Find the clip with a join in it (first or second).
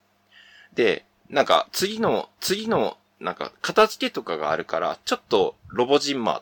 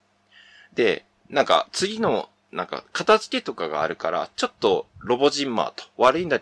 first